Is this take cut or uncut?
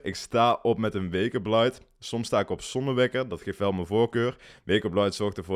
uncut